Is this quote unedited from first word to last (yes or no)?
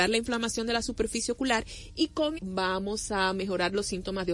no